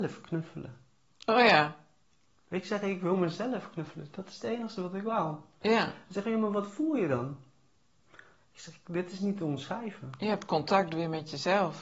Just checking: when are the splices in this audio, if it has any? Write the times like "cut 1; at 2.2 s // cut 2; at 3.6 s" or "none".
cut 1; at 2.1 s